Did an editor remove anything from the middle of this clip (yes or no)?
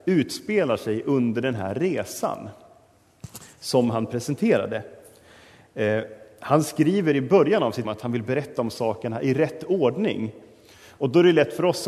yes